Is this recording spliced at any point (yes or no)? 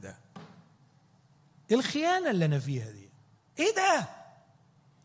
no